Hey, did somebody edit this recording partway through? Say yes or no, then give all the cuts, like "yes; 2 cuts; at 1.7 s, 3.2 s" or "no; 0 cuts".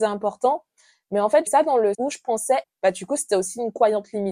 yes; 3 cuts; at 1.5 s, 1.9 s, 2.6 s